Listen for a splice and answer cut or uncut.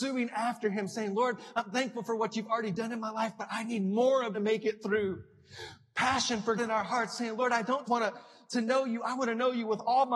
cut